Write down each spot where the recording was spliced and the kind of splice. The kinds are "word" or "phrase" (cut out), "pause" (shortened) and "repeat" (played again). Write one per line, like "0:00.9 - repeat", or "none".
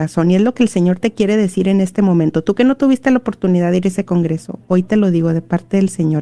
none